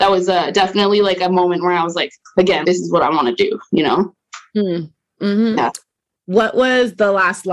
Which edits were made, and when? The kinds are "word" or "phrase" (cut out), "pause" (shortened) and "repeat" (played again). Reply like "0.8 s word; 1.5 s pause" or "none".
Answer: 2.6 s word

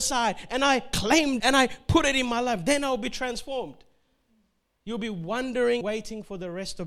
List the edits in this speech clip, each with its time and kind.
1.4 s word; 5.8 s word

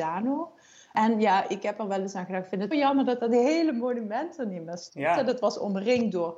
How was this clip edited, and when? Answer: 2.7 s word

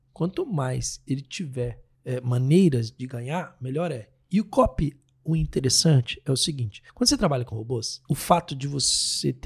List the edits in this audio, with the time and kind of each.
1.9 s pause; 6.9 s pause; 8.1 s pause

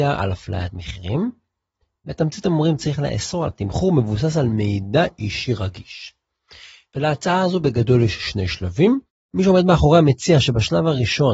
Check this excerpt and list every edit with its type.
3.5 s phrase

